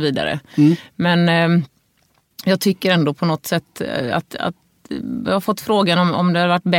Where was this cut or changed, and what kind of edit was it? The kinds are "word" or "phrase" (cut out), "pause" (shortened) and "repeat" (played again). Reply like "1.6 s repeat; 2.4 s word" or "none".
none